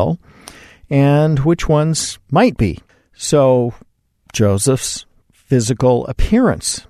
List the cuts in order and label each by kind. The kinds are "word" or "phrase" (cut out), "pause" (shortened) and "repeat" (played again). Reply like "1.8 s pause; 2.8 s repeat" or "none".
none